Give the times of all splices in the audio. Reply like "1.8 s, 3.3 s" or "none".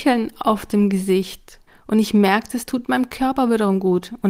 1.7 s, 2.7 s